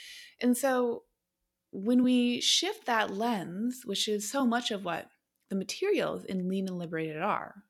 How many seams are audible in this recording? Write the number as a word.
zero